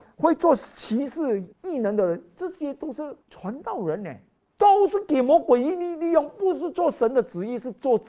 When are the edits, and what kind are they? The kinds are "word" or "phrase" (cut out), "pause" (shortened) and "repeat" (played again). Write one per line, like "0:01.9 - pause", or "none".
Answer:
0:01.5 - pause
0:03.2 - pause
0:04.4 - pause

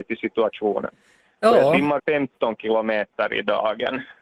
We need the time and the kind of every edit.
0:02.0 - word

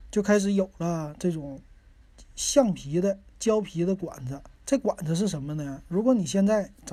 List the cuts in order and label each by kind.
0:04.6 - pause

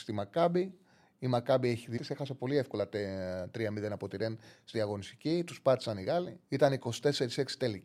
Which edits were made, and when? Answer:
0:02.0 - phrase
0:04.7 - word
0:06.4 - pause

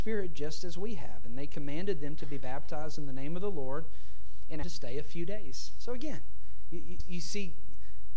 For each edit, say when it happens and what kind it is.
0:04.6 - phrase
0:07.0 - word

